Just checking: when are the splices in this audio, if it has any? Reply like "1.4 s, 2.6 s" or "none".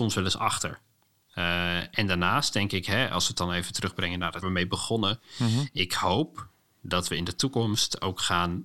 4.4 s